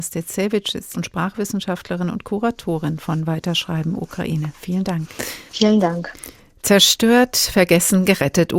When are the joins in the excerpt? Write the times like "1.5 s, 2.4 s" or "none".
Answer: 0.9 s, 5.5 s